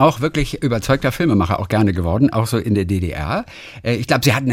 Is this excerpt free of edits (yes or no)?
yes